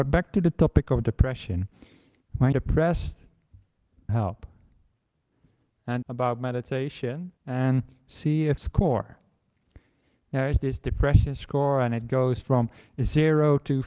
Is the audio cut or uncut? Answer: cut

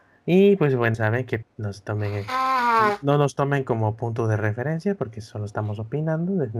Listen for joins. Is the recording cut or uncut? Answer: cut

